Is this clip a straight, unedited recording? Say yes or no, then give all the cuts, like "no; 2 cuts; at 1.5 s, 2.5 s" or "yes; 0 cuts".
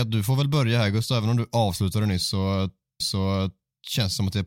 no; 1 cut; at 3.0 s